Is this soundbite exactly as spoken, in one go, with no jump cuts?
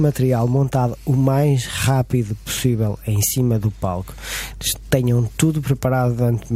yes; 0 cuts

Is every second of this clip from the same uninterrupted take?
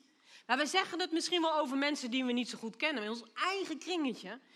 yes; 0 cuts

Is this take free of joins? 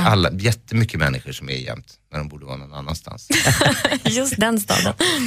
no; 1 cut; at 1.6 s

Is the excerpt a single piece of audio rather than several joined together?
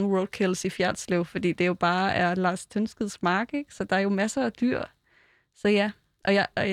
yes; 0 cuts

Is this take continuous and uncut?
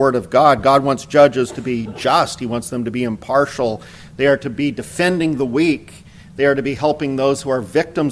yes; 0 cuts

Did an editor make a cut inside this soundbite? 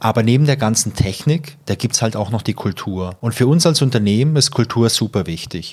no; 0 cuts

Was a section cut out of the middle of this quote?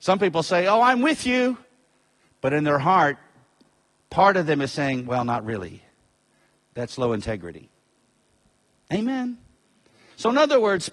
no; 0 cuts

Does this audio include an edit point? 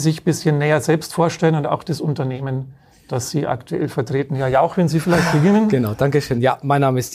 no; 0 cuts

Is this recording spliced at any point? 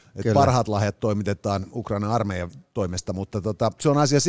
no; 0 cuts

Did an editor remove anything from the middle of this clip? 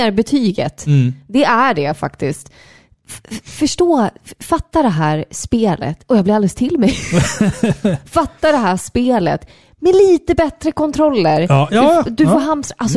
no; 0 cuts

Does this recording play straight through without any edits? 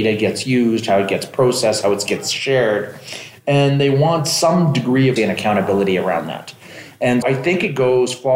no; 2 cuts; at 5.2 s, 7.2 s

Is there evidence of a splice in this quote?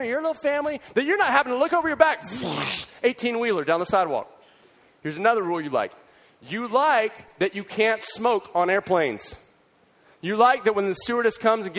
no; 0 cuts

